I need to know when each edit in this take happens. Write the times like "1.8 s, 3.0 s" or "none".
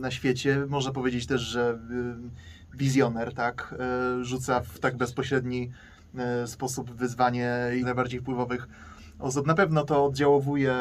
2.7 s, 7.8 s